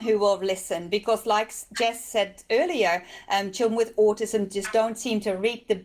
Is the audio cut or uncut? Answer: uncut